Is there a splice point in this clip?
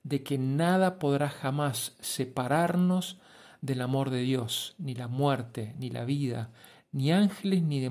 no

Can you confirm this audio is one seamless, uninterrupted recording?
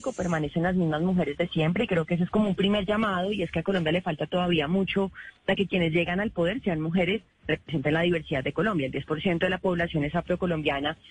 no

